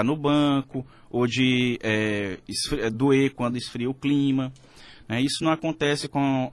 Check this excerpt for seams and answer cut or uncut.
uncut